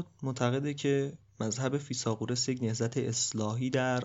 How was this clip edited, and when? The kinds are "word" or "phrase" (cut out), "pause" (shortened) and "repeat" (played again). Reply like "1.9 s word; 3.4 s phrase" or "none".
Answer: none